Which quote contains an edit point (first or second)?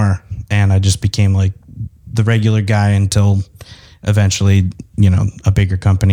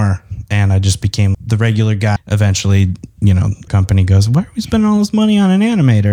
second